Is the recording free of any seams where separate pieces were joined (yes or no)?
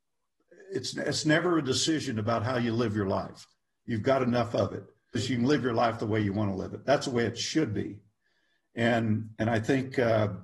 no